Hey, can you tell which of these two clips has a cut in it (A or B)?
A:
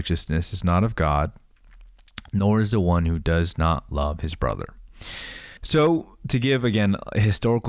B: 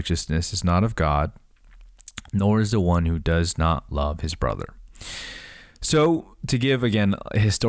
A